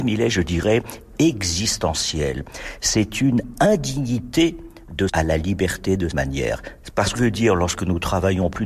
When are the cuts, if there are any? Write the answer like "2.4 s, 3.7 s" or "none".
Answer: 5.1 s, 6.1 s, 7.1 s

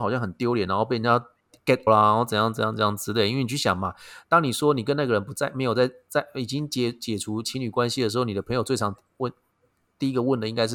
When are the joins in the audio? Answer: 1.9 s

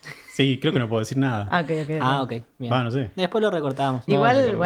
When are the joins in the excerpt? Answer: none

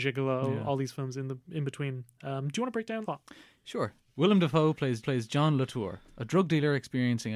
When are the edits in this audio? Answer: 3.0 s, 5.0 s

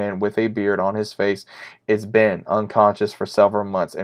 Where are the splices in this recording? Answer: 1.8 s

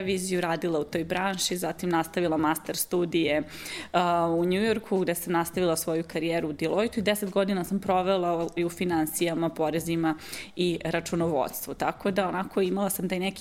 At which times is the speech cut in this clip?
8.6 s

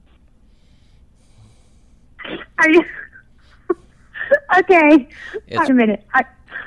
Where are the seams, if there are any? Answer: 5.7 s

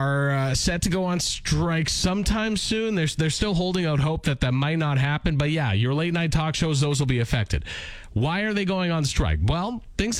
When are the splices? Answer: none

